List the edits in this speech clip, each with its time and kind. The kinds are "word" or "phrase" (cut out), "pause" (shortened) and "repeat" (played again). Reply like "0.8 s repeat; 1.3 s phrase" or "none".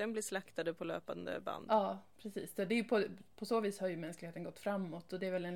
none